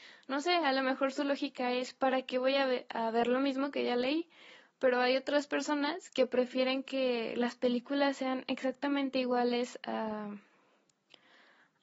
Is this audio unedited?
yes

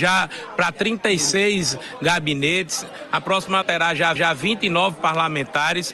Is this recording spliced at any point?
yes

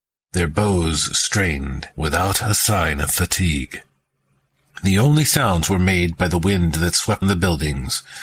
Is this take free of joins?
no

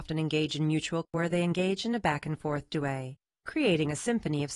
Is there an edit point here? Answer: yes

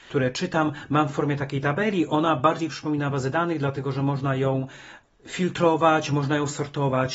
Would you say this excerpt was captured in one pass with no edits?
yes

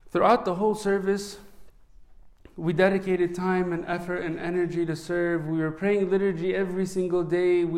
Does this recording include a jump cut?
no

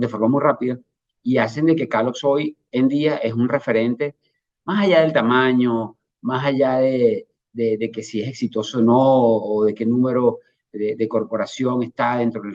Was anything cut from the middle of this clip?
no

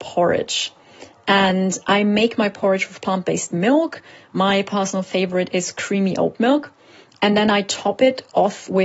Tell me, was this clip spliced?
no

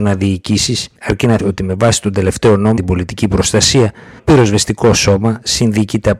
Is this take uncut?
no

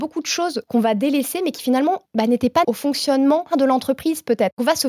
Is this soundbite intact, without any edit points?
no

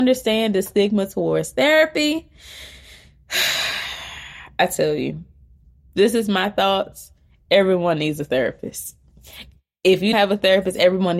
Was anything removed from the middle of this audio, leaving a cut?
yes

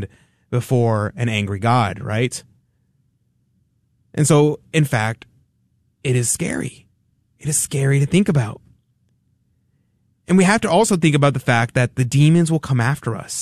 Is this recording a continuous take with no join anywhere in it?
yes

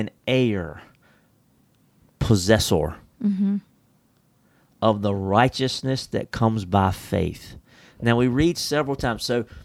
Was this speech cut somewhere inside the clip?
no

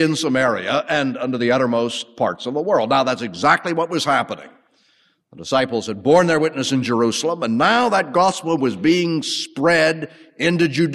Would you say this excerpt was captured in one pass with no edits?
yes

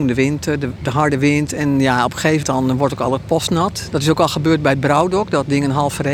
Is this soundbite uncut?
no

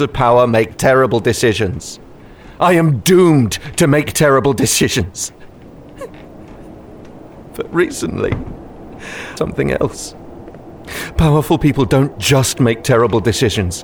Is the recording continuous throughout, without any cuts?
no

